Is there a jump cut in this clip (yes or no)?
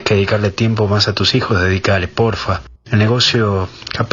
no